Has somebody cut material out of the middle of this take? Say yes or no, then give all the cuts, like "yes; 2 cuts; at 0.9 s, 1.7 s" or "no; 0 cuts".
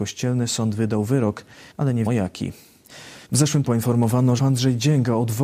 yes; 5 cuts; at 1.7 s, 2.1 s, 3.2 s, 3.6 s, 4.4 s